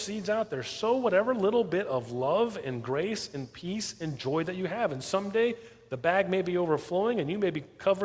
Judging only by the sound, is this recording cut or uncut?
uncut